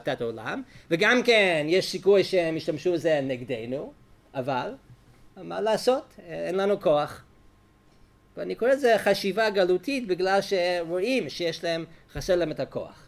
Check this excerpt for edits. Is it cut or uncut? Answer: uncut